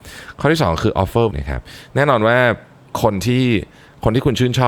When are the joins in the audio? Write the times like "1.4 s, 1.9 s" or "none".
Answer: 1.3 s